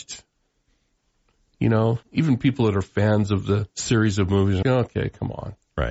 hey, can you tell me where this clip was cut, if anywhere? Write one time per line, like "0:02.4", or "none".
0:02.0
0:03.7
0:04.6